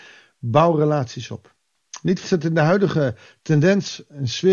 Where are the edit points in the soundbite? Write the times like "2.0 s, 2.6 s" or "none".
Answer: 2.2 s